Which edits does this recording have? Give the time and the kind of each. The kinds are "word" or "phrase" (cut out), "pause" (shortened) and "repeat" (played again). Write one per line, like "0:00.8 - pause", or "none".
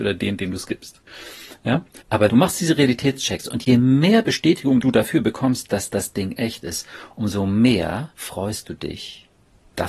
0:02.0 - pause
0:08.1 - pause